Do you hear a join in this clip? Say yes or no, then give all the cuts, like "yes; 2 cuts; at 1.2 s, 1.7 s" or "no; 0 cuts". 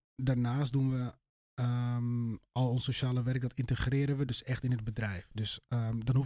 no; 0 cuts